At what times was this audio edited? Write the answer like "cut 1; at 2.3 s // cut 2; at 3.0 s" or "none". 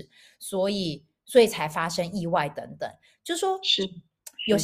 none